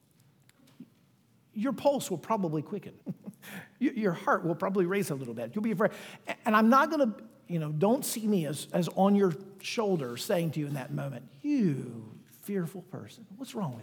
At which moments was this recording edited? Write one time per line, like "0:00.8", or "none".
0:03.0